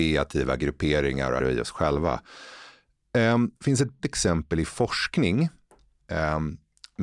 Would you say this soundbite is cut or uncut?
cut